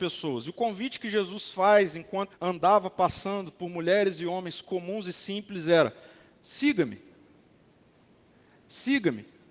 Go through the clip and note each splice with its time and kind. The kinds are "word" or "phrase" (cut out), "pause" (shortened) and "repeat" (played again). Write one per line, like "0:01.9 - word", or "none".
0:02.3 - word

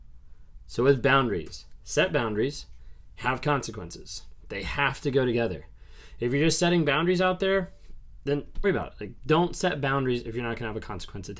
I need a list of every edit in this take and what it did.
0:08.6 - word

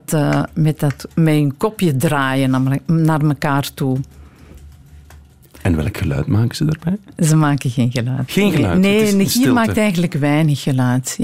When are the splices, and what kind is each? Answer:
none

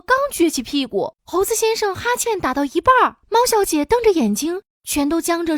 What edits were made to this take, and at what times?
0:01.2 - pause
0:03.2 - pause

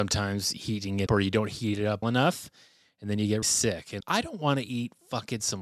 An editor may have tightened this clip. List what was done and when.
0:01.1 - word
0:02.0 - word
0:03.4 - word
0:04.0 - word

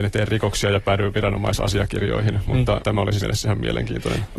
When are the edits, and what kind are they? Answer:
0:02.8 - word
0:03.2 - word

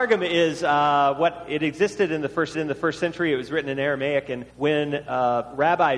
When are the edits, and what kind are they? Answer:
0:02.5 - repeat
0:04.5 - pause

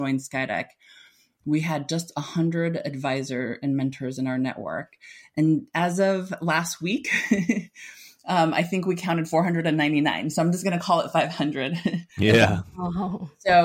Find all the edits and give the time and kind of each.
none

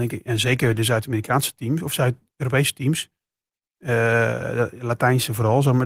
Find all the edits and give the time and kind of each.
none

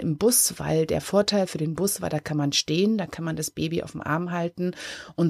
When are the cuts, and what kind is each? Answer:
none

